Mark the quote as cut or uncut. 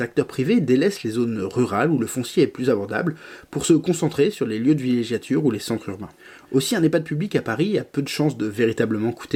uncut